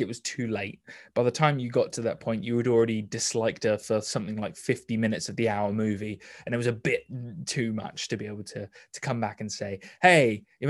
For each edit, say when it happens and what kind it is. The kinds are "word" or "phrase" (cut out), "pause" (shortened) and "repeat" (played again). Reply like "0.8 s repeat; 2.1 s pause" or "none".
none

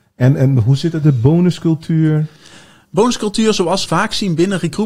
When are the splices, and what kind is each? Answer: 1.0 s word; 3.8 s word

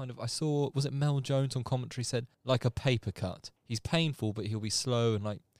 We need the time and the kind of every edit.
2.3 s pause; 3.6 s pause

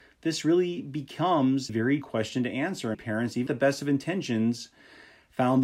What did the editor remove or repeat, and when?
1.7 s word; 2.0 s word; 2.9 s word; 3.5 s word

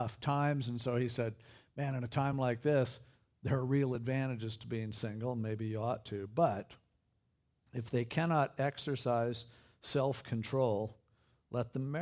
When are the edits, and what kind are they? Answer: none

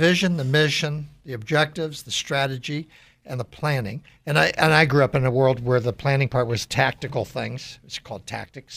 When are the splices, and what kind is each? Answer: none

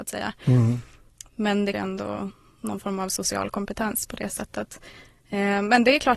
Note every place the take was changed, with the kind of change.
1.7 s word

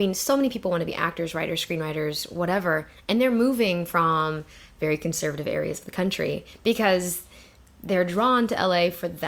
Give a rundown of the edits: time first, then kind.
none

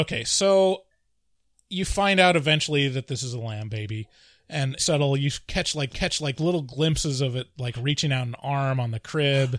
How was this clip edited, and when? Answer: 4.8 s phrase; 5.9 s repeat

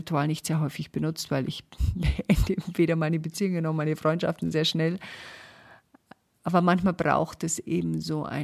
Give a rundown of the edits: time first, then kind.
none

